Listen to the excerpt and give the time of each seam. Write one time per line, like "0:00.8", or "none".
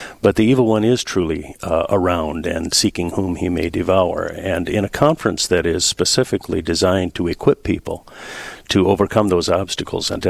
none